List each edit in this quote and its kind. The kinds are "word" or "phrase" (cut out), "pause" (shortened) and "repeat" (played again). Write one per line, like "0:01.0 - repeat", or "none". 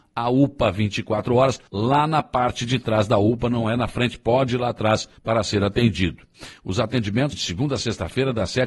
0:01.7 - pause
0:05.2 - pause
0:07.3 - word